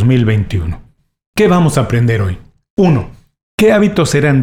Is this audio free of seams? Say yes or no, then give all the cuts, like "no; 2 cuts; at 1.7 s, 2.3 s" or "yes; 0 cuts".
yes; 0 cuts